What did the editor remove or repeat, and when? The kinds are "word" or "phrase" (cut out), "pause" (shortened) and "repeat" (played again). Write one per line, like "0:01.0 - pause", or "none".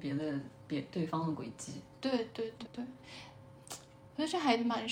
0:02.7 - word

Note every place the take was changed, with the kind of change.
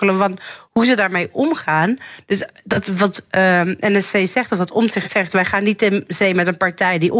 none

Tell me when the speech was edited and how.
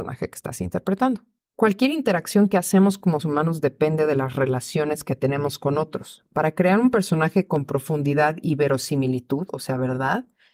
0:03.2 - word

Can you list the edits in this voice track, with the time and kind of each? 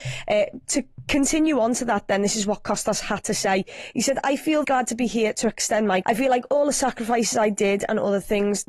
0:04.6 - word
0:06.0 - word

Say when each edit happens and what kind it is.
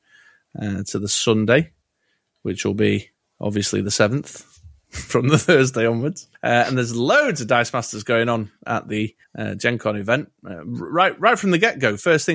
0:03.1 - pause
0:06.3 - pause
0:08.7 - word
0:09.2 - pause

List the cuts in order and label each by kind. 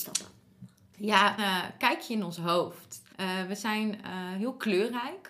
0:01.4 - phrase
0:03.1 - pause

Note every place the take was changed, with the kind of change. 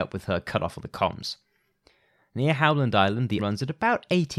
0:03.4 - word

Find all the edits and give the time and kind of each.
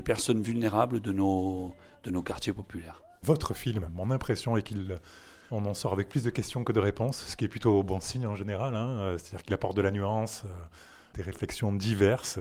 none

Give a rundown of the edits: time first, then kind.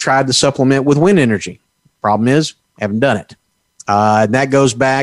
none

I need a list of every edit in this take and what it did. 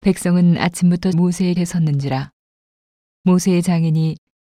0:01.1 - word
0:01.6 - word

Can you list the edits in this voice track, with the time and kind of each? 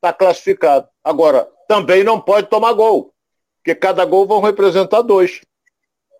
0:00.9 - pause

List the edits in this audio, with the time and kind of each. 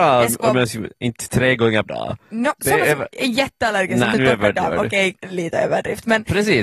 0:01.8 - word
0:03.1 - pause
0:04.1 - word
0:05.1 - word

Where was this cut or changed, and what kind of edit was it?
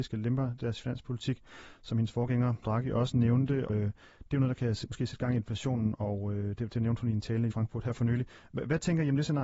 0:02.6 - word
0:03.7 - word
0:07.5 - phrase

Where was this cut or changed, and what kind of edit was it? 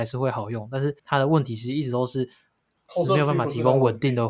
0:01.0 - pause

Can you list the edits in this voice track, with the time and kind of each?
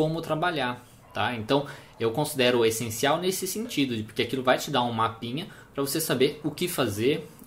none

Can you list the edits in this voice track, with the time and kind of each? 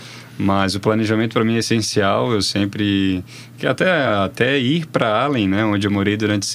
none

